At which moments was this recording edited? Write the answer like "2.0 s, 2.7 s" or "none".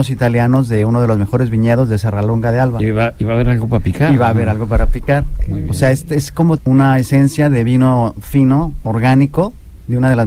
6.6 s